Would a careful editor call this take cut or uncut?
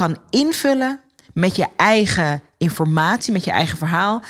uncut